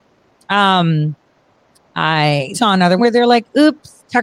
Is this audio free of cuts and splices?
no; 3 cuts; at 1.7 s, 2.5 s, 3.0 s

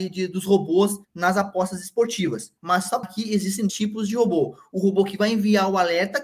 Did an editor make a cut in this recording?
yes; 4 cuts; at 1.0 s, 2.6 s, 3.0 s, 3.7 s

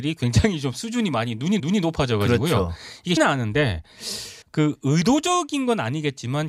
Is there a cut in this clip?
yes; 3 cuts; at 1.6 s, 3.2 s, 4.4 s

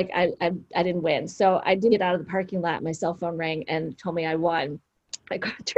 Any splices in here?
yes; 1 cut; at 1.9 s

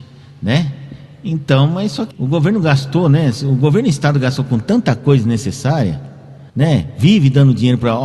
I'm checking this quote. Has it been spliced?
yes; 2 cuts; at 2.1 s, 6.5 s

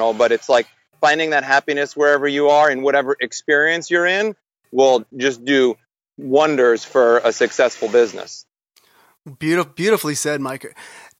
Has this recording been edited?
no; 0 cuts

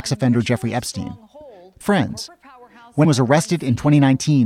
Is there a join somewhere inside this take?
yes; 2 cuts; at 1.8 s, 3.0 s

